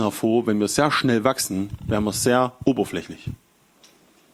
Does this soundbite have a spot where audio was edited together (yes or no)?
no